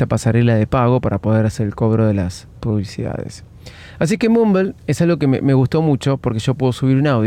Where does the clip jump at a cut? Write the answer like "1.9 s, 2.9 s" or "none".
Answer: 4.8 s